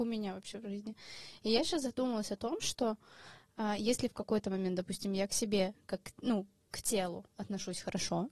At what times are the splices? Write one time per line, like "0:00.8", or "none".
none